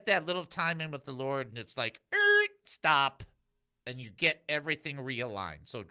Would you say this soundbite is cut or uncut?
uncut